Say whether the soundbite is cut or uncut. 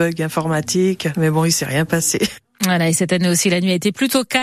uncut